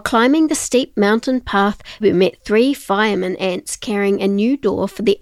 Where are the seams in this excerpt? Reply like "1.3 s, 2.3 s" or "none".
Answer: 2.0 s